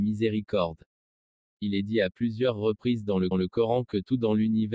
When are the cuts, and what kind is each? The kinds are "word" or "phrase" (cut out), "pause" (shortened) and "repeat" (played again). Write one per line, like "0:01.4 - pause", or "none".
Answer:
0:03.3 - repeat